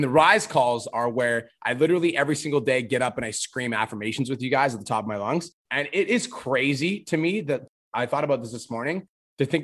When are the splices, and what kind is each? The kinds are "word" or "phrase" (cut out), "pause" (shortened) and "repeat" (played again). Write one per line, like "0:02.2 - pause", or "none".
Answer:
0:05.6 - pause